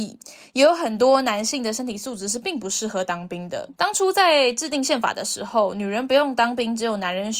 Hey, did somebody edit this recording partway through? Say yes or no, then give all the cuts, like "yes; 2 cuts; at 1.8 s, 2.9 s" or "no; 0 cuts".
yes; 1 cut; at 3.8 s